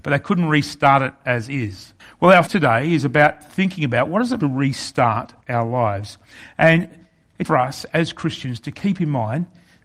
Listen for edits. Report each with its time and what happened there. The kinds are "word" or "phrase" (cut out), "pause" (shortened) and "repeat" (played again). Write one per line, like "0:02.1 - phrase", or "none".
0:02.0 - pause
0:02.5 - word
0:04.4 - phrase
0:07.5 - word